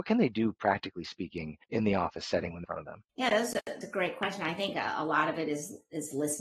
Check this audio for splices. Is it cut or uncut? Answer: cut